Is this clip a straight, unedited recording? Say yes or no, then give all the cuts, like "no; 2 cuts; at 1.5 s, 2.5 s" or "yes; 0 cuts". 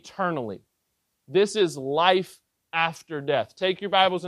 yes; 0 cuts